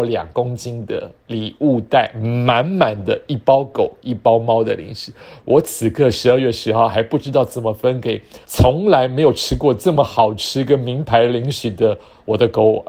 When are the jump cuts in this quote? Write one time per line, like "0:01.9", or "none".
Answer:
0:08.4